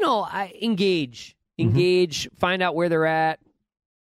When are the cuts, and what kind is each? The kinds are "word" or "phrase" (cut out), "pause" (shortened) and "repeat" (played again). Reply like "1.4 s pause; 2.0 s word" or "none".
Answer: none